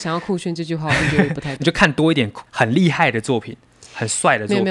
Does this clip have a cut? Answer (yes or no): yes